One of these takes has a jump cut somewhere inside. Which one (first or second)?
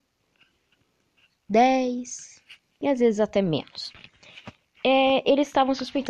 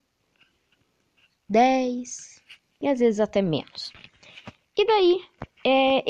first